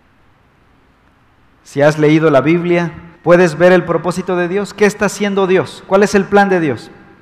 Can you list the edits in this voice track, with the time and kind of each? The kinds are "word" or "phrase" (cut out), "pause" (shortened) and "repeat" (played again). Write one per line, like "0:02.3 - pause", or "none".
0:03.2 - pause